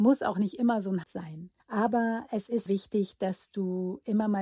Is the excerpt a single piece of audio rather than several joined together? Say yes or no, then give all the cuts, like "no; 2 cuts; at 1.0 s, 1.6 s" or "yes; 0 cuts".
no; 3 cuts; at 1.0 s, 1.6 s, 2.7 s